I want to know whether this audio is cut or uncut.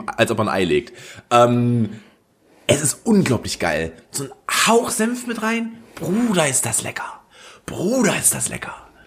uncut